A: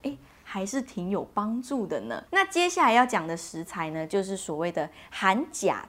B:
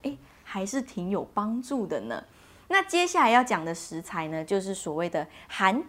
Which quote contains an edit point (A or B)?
A